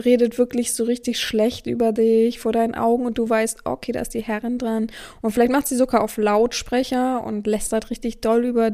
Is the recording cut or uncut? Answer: uncut